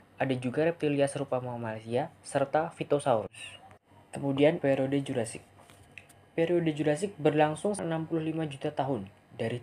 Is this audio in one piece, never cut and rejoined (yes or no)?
no